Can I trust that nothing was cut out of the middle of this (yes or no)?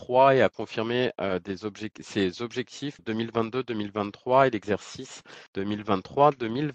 no